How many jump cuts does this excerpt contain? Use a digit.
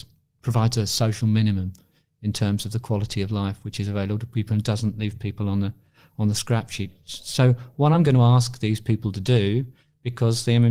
0